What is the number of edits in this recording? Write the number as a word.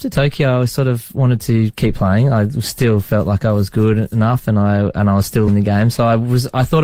one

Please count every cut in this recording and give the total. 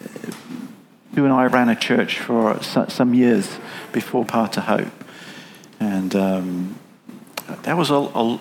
three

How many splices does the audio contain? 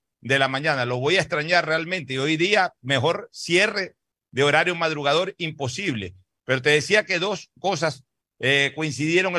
zero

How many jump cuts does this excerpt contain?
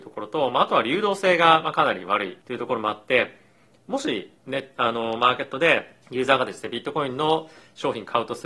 three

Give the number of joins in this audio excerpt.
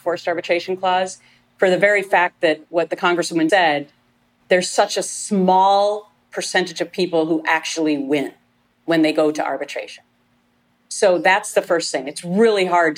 one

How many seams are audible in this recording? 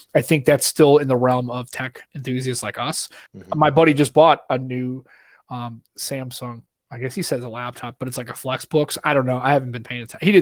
three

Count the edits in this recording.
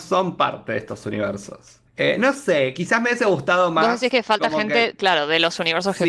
one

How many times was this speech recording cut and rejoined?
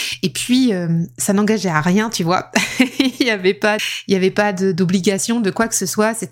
one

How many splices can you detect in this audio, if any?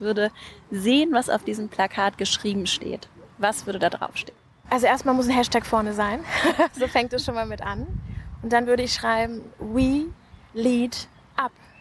zero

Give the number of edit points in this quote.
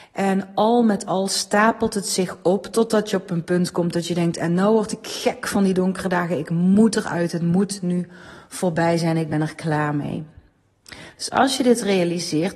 zero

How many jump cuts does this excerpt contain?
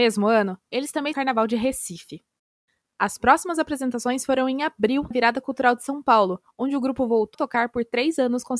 three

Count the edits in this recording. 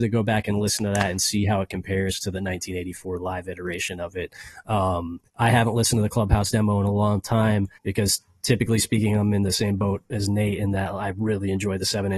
two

